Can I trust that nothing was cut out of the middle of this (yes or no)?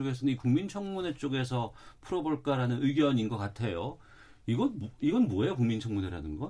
yes